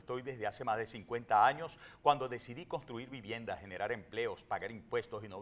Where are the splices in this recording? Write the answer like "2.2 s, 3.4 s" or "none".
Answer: none